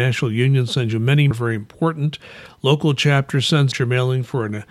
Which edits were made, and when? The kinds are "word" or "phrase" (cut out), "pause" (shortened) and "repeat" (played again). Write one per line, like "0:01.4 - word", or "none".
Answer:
0:01.3 - phrase
0:03.7 - word